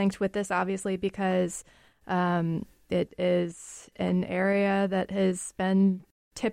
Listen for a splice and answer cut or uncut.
uncut